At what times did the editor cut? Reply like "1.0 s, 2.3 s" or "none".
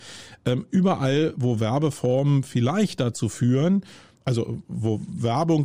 none